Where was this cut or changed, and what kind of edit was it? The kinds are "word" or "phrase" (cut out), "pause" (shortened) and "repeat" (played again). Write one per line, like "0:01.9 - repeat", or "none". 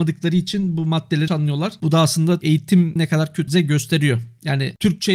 0:01.3 - word
0:02.4 - word
0:03.0 - word
0:03.5 - word